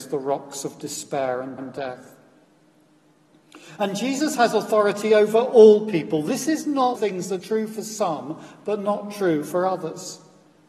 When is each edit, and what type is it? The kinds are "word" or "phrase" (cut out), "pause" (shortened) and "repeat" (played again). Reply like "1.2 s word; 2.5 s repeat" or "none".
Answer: 1.6 s repeat; 7.0 s phrase; 7.4 s word